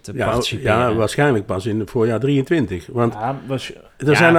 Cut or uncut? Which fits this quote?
uncut